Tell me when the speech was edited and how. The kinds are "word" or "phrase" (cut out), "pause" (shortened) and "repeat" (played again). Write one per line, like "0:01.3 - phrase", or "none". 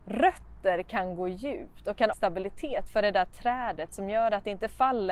0:02.1 - phrase